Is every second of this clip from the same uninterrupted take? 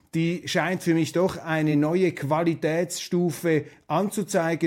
yes; 0 cuts

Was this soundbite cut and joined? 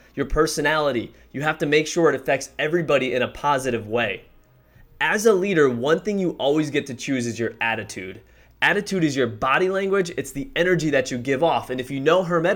no; 0 cuts

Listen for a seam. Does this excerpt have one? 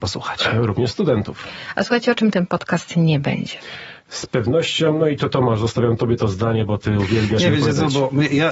no; 0 cuts

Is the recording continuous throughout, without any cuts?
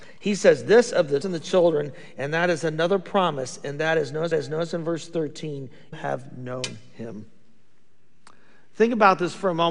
no; 3 cuts; at 1.2 s, 4.3 s, 5.9 s

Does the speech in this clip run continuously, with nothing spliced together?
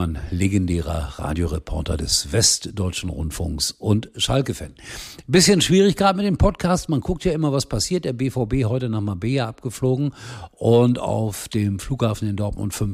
yes; 0 cuts

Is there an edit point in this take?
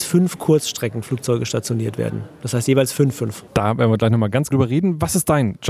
yes; 1 cut; at 4.5 s

